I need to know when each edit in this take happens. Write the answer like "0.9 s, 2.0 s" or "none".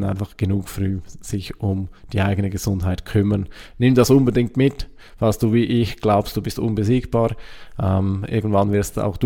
none